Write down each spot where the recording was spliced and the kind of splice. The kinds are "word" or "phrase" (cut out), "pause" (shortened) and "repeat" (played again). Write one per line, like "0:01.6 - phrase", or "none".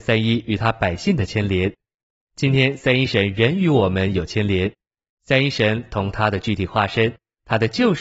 none